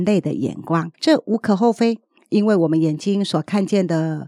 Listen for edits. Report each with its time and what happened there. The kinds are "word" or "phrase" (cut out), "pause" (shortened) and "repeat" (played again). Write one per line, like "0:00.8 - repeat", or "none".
0:00.9 - pause
0:02.2 - pause